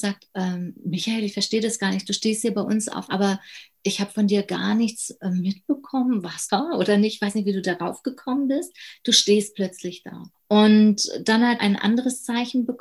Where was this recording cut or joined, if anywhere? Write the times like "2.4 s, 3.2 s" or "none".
3.1 s, 6.5 s, 10.3 s, 11.6 s

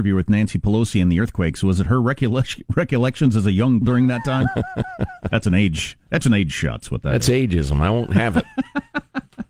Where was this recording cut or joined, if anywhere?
3.8 s

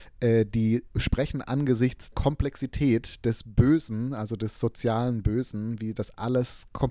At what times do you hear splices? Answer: 2.1 s

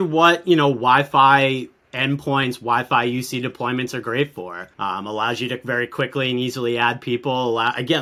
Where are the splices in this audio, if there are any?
4.7 s

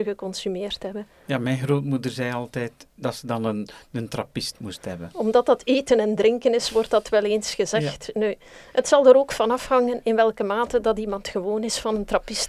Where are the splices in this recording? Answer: none

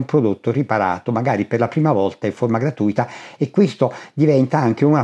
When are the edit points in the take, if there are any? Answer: none

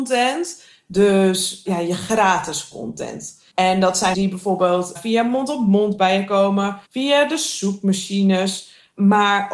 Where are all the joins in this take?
3.5 s, 4.1 s, 4.9 s, 6.8 s

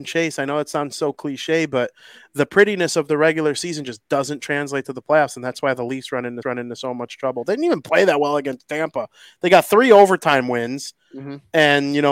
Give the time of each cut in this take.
6.4 s

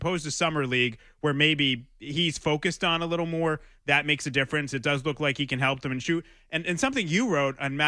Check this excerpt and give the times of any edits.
none

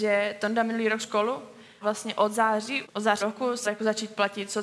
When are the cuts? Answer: 1.0 s, 1.8 s, 2.8 s, 3.2 s, 3.6 s

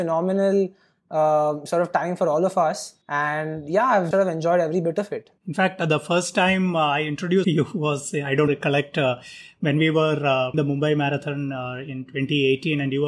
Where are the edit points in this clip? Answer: 3.0 s, 4.1 s, 5.4 s, 7.4 s, 8.5 s, 10.5 s

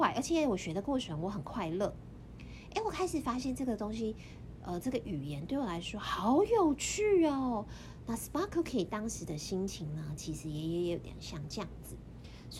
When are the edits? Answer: none

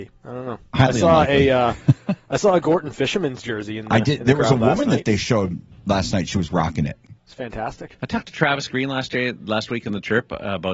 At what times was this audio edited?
7.2 s

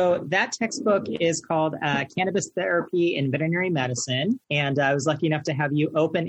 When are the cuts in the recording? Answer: 4.4 s

